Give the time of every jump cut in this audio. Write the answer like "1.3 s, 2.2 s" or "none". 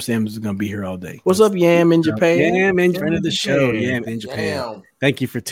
1.2 s, 2.9 s, 4.1 s